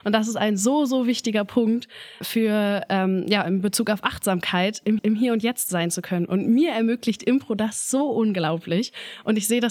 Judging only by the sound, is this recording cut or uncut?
cut